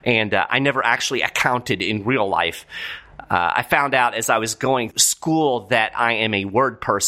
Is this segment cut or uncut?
cut